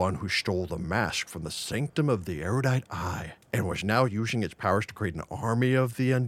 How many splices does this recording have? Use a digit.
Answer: 1